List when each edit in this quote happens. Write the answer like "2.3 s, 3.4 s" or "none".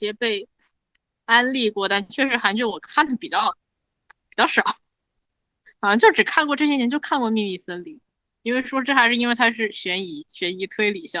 none